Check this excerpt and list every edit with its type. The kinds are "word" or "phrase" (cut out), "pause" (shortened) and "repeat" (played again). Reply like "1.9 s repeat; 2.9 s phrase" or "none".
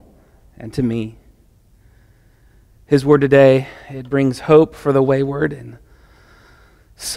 none